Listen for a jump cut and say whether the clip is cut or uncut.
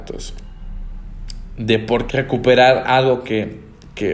cut